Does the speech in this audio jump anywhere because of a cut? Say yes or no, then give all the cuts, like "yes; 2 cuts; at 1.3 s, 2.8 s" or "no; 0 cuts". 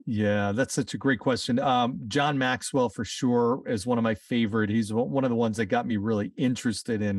no; 0 cuts